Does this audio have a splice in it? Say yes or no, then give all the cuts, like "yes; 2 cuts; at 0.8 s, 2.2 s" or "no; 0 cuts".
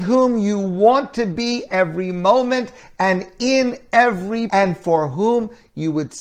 yes; 2 cuts; at 1.7 s, 4.5 s